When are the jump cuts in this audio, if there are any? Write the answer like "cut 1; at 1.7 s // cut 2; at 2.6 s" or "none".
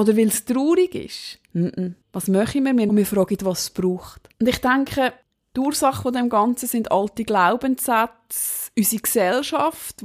cut 1; at 2.0 s // cut 2; at 2.9 s // cut 3; at 4.3 s